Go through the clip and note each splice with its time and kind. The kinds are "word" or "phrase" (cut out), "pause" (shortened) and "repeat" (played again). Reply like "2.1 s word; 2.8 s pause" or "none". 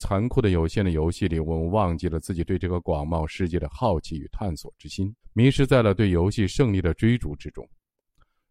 5.2 s pause